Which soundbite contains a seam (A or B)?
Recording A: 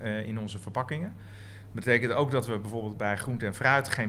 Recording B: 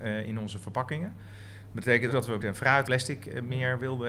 B